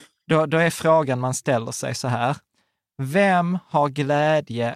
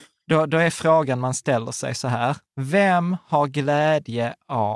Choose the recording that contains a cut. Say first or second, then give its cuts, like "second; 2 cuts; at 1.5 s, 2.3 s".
second; 1 cut; at 2.5 s